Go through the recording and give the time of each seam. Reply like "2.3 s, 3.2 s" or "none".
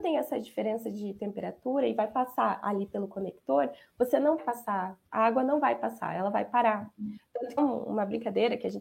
4.4 s, 5.0 s, 7.6 s